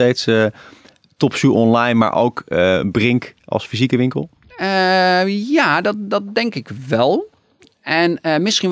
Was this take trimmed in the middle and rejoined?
no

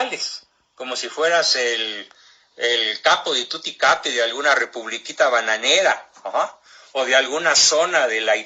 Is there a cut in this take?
no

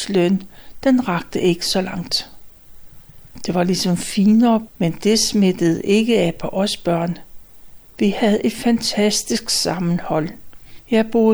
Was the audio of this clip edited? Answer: yes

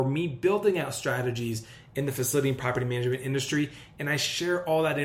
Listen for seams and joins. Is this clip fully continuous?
yes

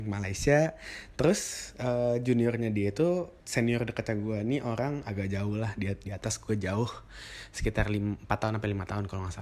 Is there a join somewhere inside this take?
yes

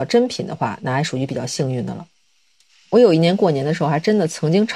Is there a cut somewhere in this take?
no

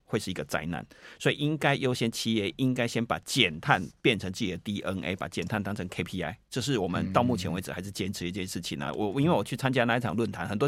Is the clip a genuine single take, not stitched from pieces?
yes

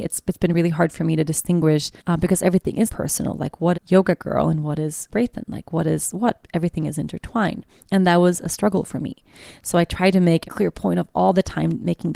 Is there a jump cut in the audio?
yes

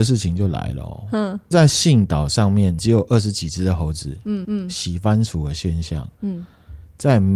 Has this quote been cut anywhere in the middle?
yes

